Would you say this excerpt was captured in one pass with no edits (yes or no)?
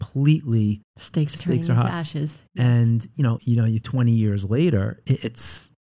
no